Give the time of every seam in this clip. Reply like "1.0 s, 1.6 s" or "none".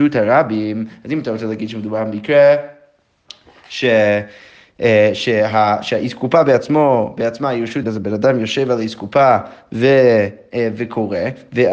7.8 s